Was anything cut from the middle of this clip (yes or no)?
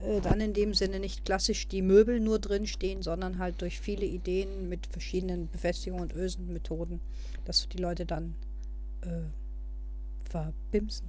no